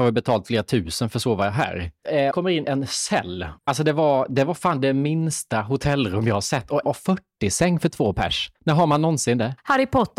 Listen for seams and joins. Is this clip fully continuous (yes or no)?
no